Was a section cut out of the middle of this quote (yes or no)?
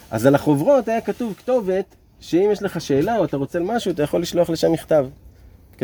yes